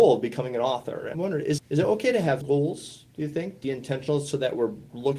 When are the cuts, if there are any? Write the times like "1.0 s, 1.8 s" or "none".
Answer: 1.1 s, 1.6 s, 2.4 s, 3.6 s